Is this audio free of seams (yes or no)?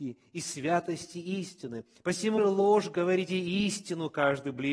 no